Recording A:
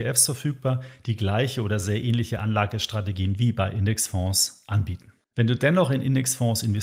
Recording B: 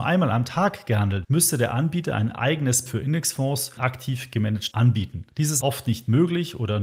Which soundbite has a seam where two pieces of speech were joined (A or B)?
B